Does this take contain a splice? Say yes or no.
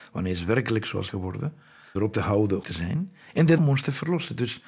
yes